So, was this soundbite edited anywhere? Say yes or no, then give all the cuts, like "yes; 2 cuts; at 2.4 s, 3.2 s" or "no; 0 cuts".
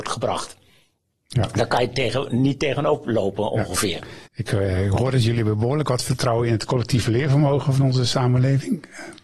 yes; 1 cut; at 4.3 s